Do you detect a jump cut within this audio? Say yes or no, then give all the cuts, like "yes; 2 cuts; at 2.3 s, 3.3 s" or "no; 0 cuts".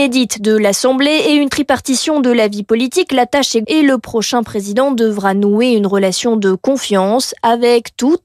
yes; 1 cut; at 3.6 s